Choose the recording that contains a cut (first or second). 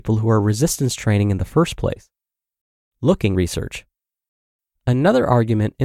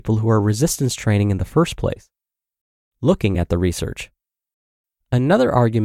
first